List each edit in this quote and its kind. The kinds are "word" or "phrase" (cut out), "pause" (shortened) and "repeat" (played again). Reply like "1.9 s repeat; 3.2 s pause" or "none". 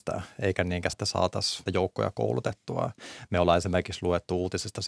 0.9 s phrase; 1.7 s word